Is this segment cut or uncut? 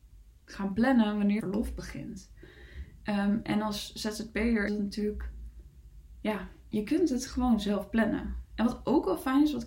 cut